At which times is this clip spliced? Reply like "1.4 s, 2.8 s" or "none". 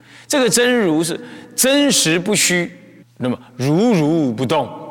3.0 s